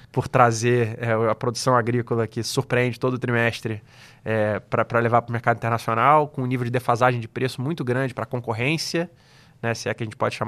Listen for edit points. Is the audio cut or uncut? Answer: uncut